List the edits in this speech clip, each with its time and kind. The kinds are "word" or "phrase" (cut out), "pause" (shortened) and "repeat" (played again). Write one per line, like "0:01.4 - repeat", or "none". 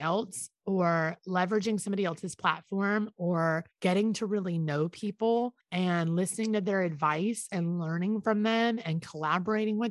0:03.7 - pause
0:05.6 - pause